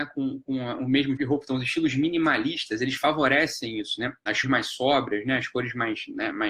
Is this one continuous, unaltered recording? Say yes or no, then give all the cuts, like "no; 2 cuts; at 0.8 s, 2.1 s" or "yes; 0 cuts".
no; 2 cuts; at 1.2 s, 4.4 s